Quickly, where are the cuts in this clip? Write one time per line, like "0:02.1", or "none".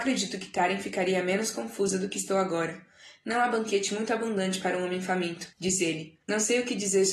0:05.5
0:06.2